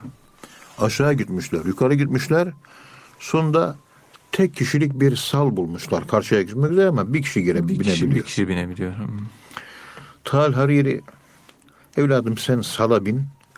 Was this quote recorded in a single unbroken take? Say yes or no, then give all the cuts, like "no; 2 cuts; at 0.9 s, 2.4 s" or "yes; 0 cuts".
yes; 0 cuts